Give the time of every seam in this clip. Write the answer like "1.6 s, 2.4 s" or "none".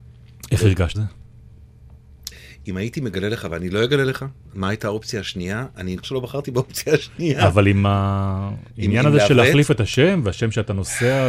0.9 s, 6.0 s